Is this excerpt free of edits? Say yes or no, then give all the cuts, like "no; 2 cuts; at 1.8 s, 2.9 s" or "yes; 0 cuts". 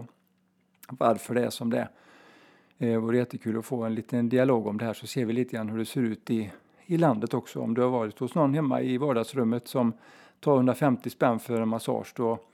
yes; 0 cuts